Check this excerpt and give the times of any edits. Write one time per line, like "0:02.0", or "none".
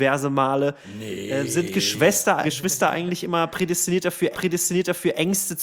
0:02.4
0:04.3